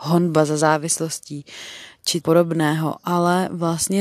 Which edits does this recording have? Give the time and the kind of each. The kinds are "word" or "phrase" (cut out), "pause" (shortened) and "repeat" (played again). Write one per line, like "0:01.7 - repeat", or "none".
0:02.2 - word